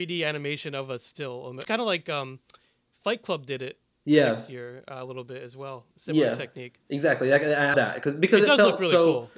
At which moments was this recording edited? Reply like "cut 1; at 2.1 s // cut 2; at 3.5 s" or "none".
cut 1; at 1.6 s // cut 2; at 5.9 s // cut 3; at 7.7 s